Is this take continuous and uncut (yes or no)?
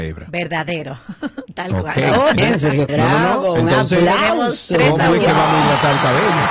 no